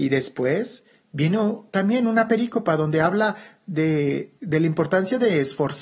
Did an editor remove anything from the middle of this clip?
yes; 1 cut; at 4.4 s

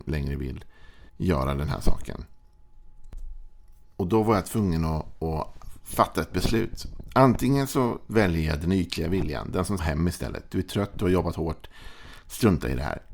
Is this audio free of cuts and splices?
no; 2 cuts; at 1.1 s, 9.8 s

